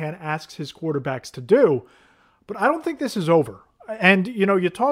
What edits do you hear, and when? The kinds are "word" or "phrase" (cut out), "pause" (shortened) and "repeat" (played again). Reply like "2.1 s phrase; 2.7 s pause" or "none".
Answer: none